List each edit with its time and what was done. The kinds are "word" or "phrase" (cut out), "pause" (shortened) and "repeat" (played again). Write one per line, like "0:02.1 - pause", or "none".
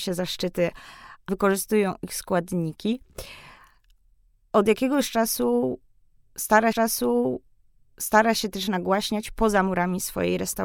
0:01.3 - phrase
0:06.7 - repeat